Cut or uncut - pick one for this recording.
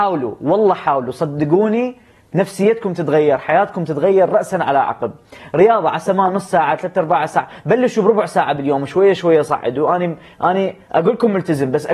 uncut